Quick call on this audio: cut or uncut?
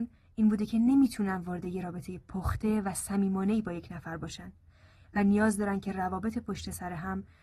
uncut